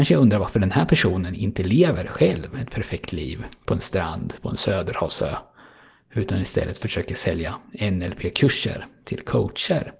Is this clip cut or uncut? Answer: uncut